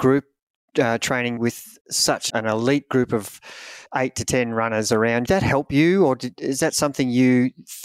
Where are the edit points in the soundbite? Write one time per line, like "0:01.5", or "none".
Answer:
0:01.4
0:02.3
0:03.9
0:05.3

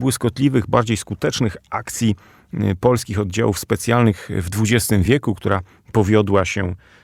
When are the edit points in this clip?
none

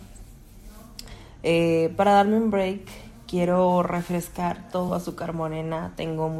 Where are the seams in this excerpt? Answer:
none

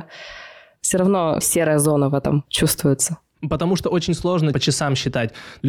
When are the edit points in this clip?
none

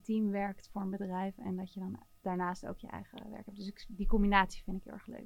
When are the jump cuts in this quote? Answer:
none

